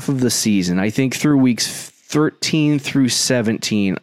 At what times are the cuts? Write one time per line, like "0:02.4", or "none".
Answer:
none